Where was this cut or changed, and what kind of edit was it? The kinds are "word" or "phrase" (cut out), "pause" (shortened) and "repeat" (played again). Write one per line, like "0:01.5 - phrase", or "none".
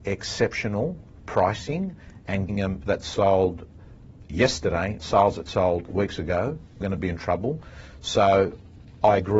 0:01.2 - word
0:02.5 - word
0:02.8 - word
0:05.0 - word
0:05.9 - word
0:06.8 - word